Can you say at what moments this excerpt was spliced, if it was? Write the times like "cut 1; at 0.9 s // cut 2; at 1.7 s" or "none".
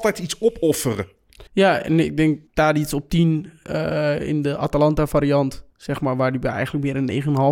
cut 1; at 1.5 s // cut 2; at 2.5 s // cut 3; at 5.7 s